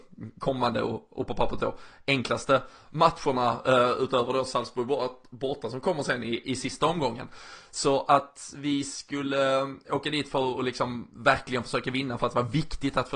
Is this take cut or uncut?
uncut